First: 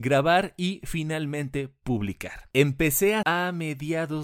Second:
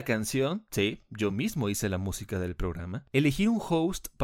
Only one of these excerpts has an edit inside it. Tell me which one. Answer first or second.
first